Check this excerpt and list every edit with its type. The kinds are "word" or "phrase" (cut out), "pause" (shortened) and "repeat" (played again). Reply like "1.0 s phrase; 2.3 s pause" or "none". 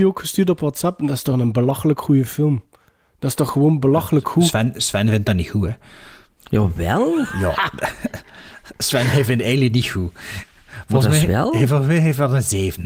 none

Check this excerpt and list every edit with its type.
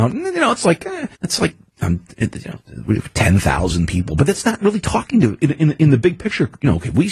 1.1 s pause

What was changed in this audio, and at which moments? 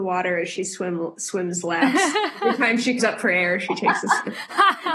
3.0 s word

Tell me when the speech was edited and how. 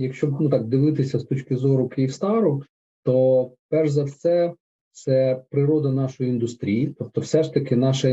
none

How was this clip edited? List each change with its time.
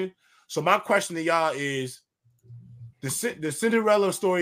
2.9 s pause

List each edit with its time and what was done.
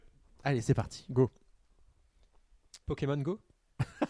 2.8 s pause

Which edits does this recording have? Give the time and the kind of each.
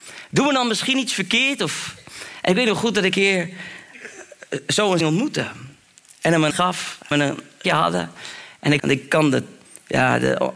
3.1 s word; 5.0 s word; 6.5 s word; 7.1 s word; 7.6 s word; 8.8 s word

